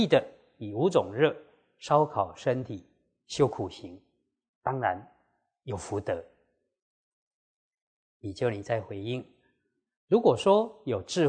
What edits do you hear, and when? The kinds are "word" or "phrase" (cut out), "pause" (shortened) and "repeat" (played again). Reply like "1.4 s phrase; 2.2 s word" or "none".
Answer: none